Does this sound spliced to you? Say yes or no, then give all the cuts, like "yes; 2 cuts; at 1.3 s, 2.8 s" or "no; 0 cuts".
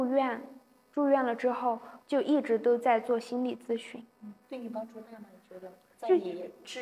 yes; 2 cuts; at 2.0 s, 4.1 s